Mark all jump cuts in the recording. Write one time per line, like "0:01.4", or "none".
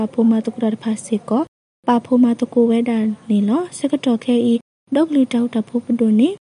none